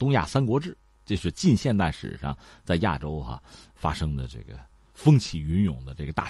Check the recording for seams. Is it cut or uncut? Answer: uncut